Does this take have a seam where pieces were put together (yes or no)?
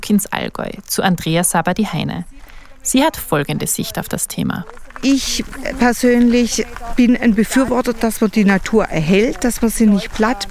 no